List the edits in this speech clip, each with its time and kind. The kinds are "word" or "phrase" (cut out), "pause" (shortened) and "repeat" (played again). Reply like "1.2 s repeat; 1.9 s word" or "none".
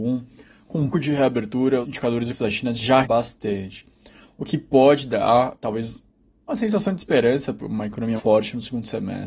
0.9 s word; 1.8 s word; 2.3 s word; 3.0 s word; 7.6 s word; 8.2 s word